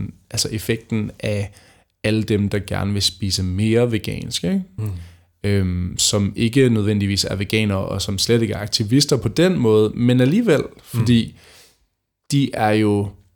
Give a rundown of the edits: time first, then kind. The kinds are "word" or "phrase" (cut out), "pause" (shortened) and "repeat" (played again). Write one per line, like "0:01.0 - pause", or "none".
none